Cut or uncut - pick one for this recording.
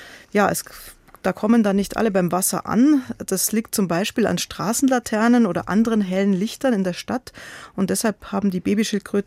uncut